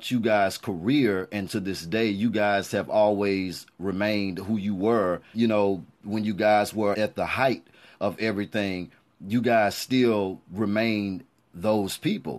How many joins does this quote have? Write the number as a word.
three